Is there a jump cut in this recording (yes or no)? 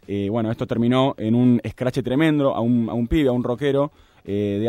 no